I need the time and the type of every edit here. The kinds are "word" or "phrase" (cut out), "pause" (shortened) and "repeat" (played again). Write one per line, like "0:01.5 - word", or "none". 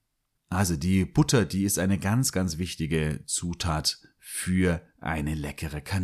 0:02.3 - word